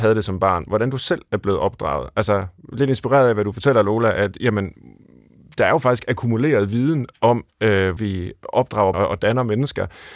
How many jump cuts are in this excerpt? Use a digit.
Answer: 2